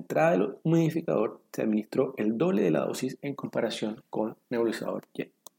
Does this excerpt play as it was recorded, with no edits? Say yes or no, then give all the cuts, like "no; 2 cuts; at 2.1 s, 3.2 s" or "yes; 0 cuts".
yes; 0 cuts